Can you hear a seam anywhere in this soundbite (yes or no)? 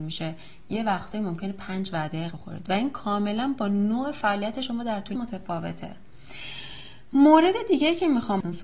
yes